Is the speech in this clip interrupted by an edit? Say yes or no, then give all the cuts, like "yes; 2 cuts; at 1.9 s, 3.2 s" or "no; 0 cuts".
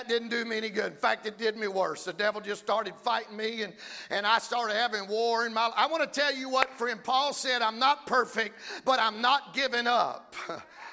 no; 0 cuts